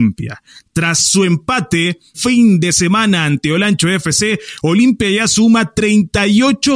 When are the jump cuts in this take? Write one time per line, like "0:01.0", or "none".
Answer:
0:02.1